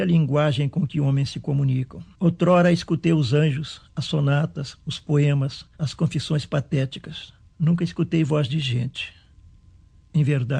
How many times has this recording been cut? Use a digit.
3